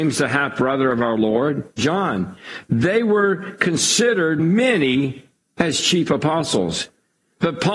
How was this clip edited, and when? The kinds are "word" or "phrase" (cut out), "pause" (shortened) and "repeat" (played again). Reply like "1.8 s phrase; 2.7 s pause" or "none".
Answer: 1.8 s word; 4.4 s word